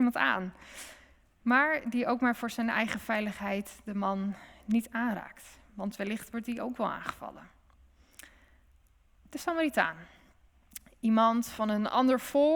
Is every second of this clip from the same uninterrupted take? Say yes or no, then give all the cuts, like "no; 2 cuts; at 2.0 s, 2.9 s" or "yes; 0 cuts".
yes; 0 cuts